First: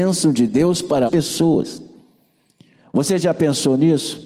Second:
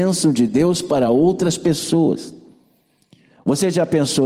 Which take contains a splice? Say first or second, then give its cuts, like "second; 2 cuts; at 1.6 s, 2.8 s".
first; 1 cut; at 1.1 s